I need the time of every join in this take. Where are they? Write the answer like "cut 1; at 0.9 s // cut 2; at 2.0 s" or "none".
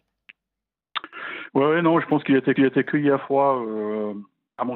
cut 1; at 2.6 s